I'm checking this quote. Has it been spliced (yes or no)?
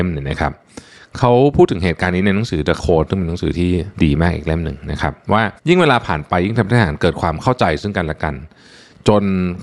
yes